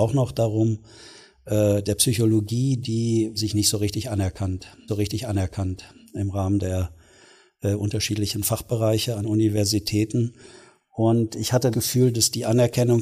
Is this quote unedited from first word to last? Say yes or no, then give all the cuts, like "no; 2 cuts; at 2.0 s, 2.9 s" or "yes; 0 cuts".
no; 4 cuts; at 3.4 s, 4.9 s, 9.2 s, 11.7 s